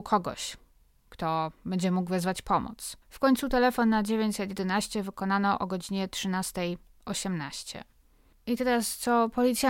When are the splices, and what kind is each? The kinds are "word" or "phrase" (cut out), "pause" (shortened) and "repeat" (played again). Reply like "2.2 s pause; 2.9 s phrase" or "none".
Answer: 3.0 s pause